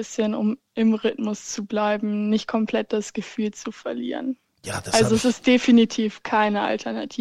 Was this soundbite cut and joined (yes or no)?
no